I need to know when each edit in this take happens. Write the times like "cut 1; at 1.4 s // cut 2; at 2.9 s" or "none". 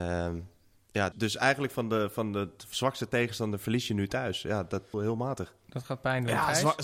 cut 1; at 1.1 s // cut 2; at 4.9 s